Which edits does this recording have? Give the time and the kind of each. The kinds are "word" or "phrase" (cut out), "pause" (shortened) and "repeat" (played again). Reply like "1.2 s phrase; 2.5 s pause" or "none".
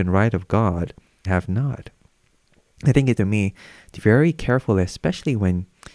1.3 s word; 3.2 s word; 4.0 s word